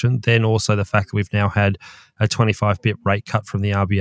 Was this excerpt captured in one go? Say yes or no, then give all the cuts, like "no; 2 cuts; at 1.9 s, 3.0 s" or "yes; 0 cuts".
yes; 0 cuts